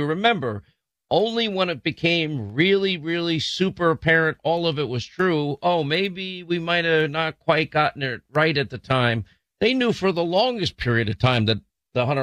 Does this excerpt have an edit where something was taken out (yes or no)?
no